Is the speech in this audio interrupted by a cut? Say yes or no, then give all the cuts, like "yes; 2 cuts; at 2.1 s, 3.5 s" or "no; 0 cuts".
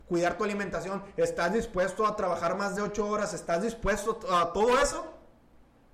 no; 0 cuts